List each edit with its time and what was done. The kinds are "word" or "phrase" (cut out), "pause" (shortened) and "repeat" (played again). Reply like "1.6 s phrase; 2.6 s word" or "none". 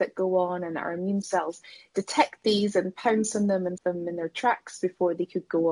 1.2 s word; 3.8 s word